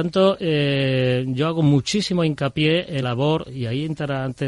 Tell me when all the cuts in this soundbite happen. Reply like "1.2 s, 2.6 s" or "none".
3.0 s